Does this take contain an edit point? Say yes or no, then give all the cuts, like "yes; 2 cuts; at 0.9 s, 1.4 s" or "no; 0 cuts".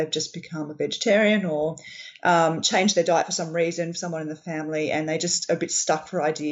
no; 0 cuts